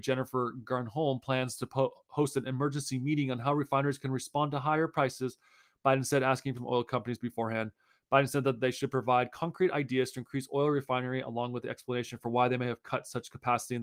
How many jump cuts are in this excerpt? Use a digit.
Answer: 1